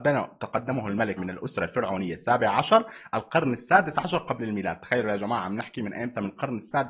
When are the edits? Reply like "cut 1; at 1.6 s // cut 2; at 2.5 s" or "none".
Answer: cut 1; at 1.2 s